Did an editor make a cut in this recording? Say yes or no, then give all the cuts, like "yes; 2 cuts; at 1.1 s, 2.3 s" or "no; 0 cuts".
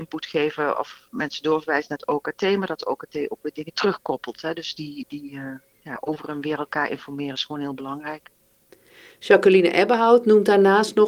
no; 0 cuts